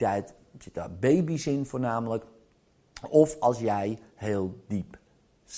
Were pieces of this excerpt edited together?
no; 0 cuts

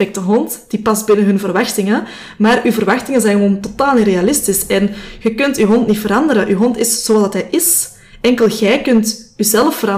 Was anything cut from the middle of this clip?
no; 0 cuts

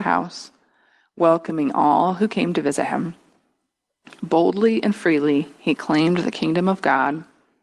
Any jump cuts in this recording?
no; 0 cuts

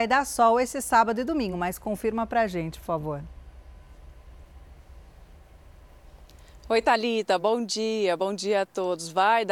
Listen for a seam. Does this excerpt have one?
no; 0 cuts

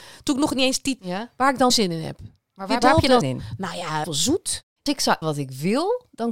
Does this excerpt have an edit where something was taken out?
yes; 7 cuts; at 1.0 s, 1.7 s, 2.8 s, 3.2 s, 4.0 s, 4.9 s, 5.2 s

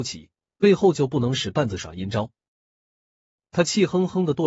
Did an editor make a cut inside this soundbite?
no; 0 cuts

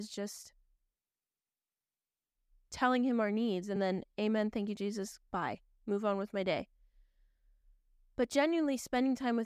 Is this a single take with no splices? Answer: yes; 0 cuts

